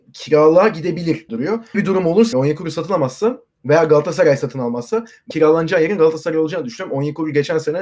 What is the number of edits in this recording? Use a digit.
4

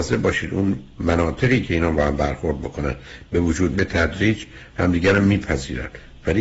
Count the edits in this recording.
2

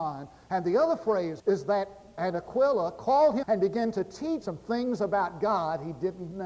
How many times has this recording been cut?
4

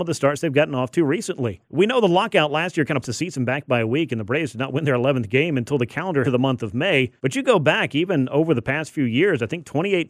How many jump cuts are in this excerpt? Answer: 4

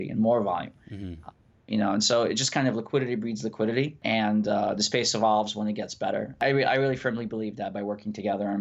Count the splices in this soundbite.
0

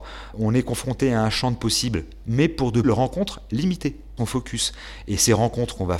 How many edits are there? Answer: 3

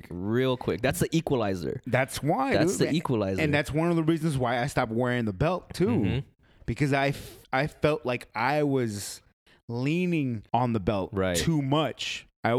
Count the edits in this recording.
2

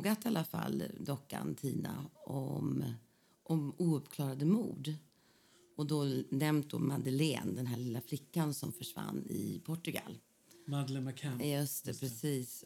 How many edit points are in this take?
0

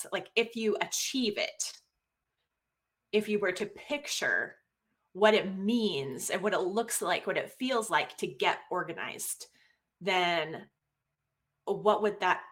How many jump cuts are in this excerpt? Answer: 0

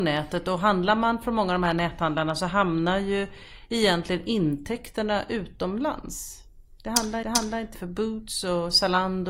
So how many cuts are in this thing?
2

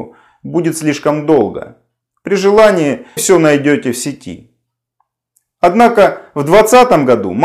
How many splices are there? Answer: 1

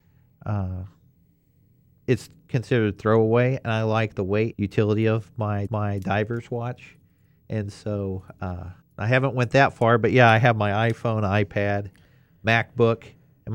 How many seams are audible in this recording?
3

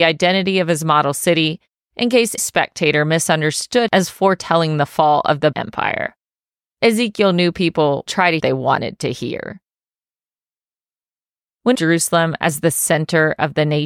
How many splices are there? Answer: 6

